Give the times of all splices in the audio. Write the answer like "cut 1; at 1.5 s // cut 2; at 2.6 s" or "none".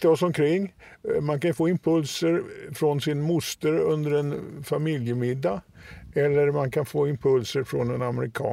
none